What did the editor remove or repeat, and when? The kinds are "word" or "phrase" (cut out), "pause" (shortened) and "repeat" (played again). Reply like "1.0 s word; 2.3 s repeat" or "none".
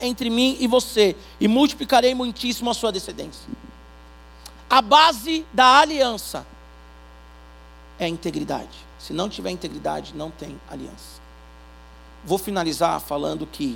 8.9 s pause

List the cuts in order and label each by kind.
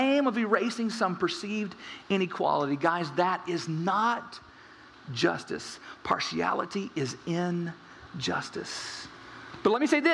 none

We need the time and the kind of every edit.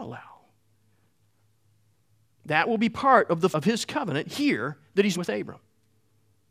3.5 s word; 5.1 s word

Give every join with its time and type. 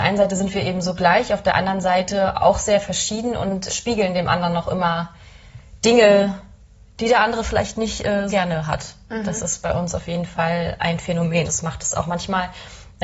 3.7 s word; 8.3 s word; 11.5 s word

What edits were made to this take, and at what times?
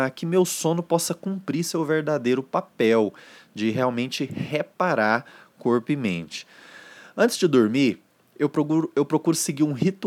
none

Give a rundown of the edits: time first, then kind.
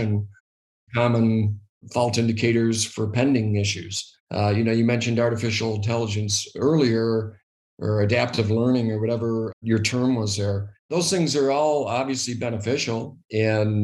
4.2 s pause; 10.8 s pause

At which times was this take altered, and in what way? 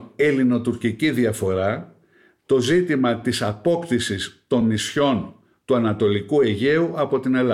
none

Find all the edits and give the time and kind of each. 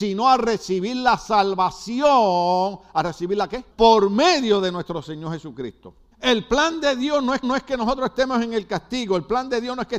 3.7 s pause; 6.1 s pause; 7.4 s repeat

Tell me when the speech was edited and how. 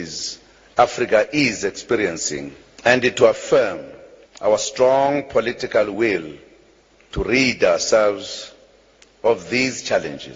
none

